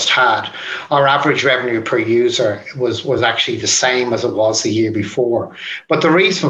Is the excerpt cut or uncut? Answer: uncut